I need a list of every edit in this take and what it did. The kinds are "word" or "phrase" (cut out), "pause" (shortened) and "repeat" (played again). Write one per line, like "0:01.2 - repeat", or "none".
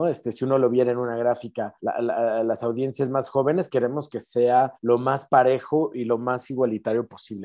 0:01.8 - pause
0:04.8 - pause